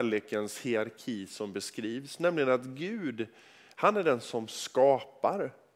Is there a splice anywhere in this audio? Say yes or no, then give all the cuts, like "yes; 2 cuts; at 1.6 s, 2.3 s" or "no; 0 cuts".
no; 0 cuts